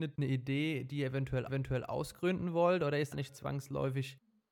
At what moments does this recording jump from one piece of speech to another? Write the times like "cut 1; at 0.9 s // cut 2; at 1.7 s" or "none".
cut 1; at 1.5 s // cut 2; at 3.1 s